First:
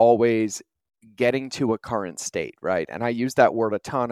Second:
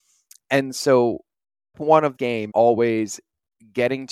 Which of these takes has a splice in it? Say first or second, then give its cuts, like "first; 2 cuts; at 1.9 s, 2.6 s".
second; 3 cuts; at 1.7 s, 2.2 s, 2.5 s